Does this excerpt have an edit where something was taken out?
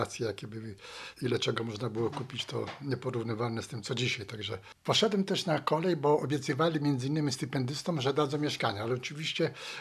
yes; 1 cut; at 1.2 s

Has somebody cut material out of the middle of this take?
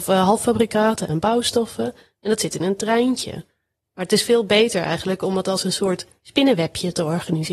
no; 0 cuts

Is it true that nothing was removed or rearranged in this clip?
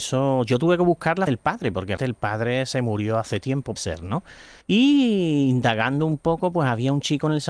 no; 4 cuts; at 1.3 s, 2.0 s, 3.8 s, 4.6 s

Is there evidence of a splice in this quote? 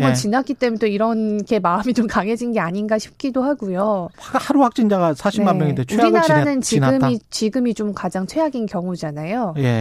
yes; 1 cut; at 4.1 s

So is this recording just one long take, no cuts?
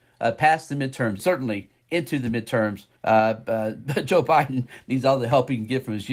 no; 2 cuts; at 1.2 s, 3.0 s

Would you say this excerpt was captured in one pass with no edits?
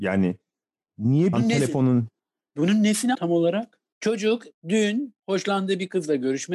no; 4 cuts; at 1.3 s, 2.2 s, 3.1 s, 3.9 s

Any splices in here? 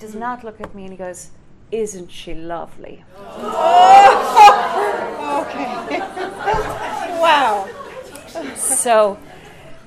no; 0 cuts

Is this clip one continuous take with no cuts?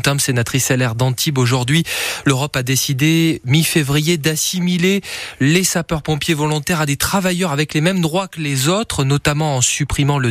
yes; 0 cuts

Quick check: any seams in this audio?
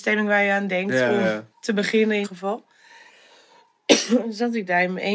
yes; 2 cuts; at 1.5 s, 2.2 s

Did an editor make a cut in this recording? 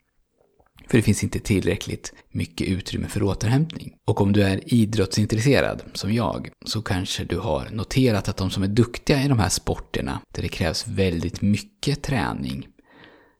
yes; 4 cuts; at 2.2 s, 4.0 s, 6.5 s, 10.2 s

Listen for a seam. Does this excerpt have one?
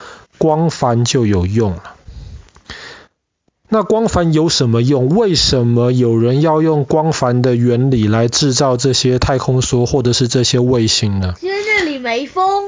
no; 0 cuts

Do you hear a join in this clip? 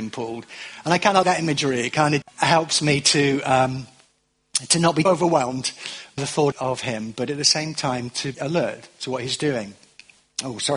yes; 6 cuts; at 1.2 s, 2.2 s, 5.1 s, 6.2 s, 6.5 s, 8.3 s

